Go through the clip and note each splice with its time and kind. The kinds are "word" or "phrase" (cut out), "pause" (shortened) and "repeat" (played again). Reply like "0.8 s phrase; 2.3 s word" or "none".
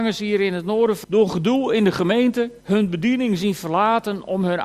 1.0 s word; 2.6 s pause

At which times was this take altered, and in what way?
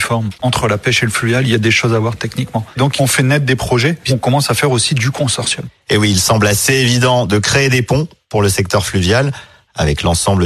none

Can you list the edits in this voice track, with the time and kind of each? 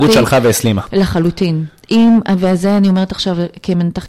none

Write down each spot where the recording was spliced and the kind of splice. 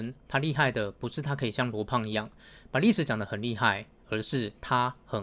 none

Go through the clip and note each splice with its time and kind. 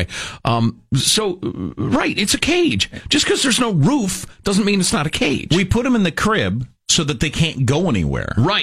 none

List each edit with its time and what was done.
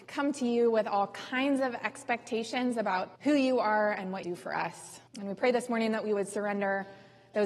3.2 s pause; 4.2 s phrase; 5.1 s pause

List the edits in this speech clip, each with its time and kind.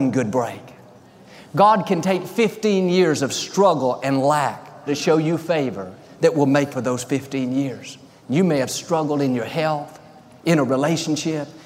4.9 s phrase; 6.7 s word; 8.1 s pause

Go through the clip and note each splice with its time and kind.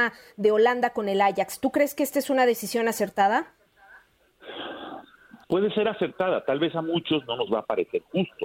5.4 s pause

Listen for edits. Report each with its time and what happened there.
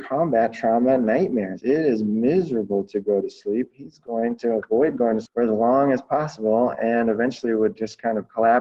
5.3 s word

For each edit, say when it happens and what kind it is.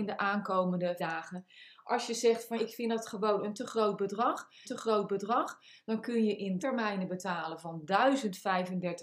1.0 s word; 2.6 s word; 4.6 s repeat; 6.6 s word

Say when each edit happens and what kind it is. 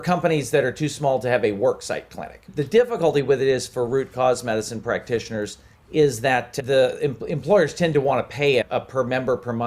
5.7 s pause

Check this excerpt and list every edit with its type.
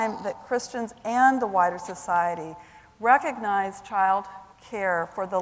4.5 s pause

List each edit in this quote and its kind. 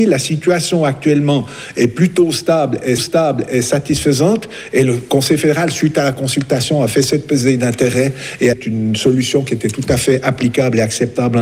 3.0 s repeat; 8.5 s phrase

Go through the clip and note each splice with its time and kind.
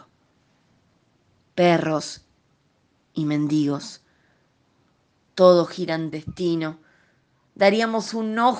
6.1 s phrase

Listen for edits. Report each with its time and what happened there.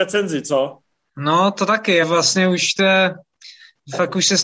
0.9 s pause; 2.0 s word

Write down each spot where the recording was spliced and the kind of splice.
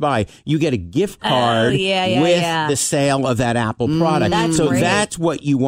none

